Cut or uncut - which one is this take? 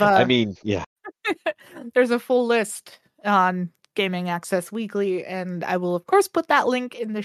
uncut